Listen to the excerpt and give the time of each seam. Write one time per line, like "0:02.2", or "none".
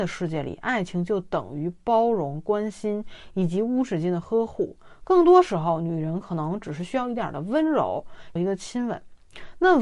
0:08.4